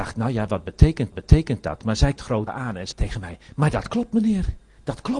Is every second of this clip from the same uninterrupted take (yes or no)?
no